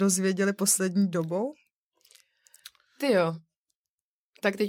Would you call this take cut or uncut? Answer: uncut